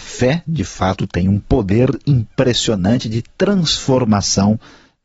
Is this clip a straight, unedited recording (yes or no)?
yes